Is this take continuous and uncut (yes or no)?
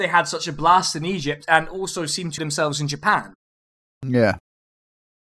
no